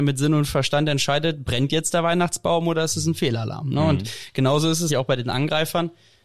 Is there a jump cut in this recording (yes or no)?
yes